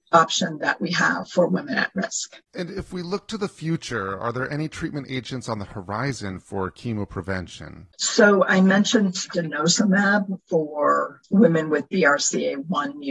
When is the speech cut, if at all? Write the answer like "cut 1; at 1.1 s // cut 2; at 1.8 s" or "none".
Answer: cut 1; at 2.4 s // cut 2; at 7.9 s // cut 3; at 10.4 s